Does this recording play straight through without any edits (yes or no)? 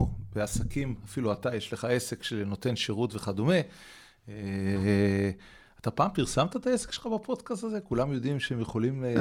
yes